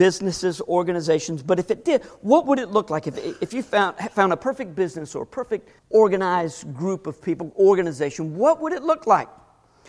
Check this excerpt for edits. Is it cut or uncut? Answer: cut